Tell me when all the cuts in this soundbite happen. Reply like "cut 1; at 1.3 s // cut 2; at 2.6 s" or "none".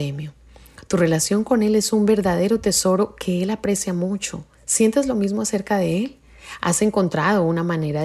cut 1; at 4.5 s